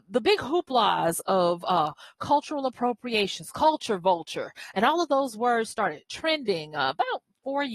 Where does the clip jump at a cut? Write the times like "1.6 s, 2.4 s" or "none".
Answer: none